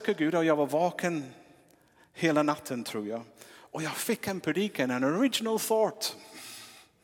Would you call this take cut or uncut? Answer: uncut